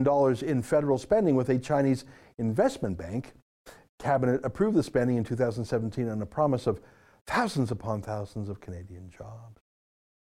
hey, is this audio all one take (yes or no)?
yes